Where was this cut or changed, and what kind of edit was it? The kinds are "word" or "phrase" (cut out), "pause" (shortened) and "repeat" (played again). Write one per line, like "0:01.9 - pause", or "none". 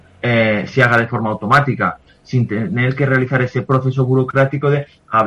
none